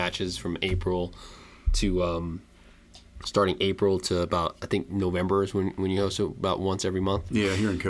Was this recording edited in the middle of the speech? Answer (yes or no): no